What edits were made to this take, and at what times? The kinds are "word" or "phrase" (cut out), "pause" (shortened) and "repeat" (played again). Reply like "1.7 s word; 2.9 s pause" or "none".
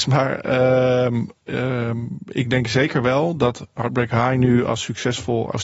none